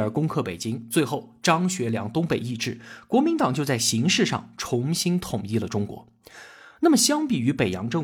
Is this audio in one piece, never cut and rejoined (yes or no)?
yes